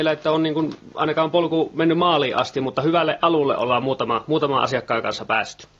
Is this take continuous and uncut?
yes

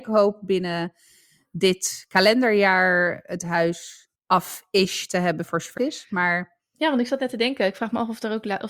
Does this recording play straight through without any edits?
no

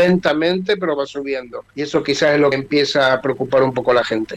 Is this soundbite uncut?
no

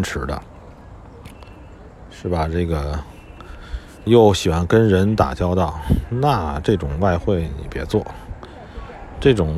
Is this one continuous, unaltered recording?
no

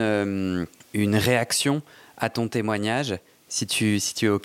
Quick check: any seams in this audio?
no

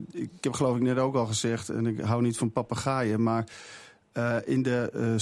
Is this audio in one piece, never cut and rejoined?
yes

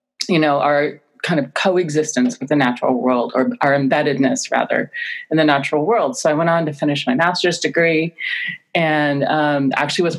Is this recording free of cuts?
yes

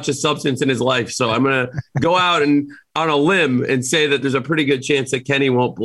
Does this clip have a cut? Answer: no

